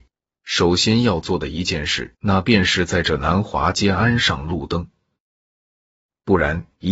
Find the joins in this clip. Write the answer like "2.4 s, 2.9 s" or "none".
2.1 s